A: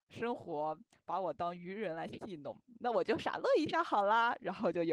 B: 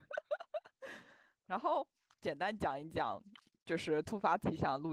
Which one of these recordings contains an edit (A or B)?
B